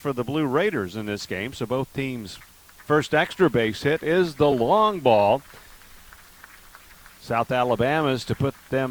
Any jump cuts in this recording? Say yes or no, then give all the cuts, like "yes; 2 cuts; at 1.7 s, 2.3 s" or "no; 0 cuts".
no; 0 cuts